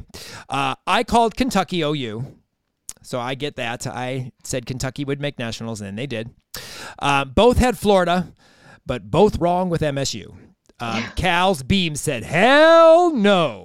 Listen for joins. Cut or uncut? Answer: uncut